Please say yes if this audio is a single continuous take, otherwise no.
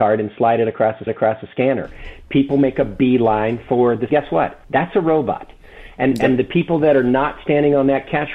no